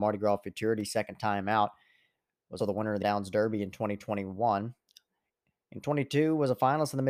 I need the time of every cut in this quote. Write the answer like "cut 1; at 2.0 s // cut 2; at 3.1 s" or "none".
cut 1; at 2.6 s // cut 2; at 3.0 s